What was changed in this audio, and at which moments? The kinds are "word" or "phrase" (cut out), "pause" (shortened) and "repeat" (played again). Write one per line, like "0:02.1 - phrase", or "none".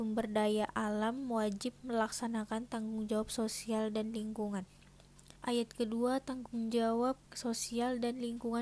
0:05.4 - pause
0:07.2 - pause